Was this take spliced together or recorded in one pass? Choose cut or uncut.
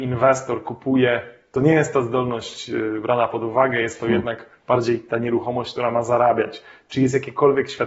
uncut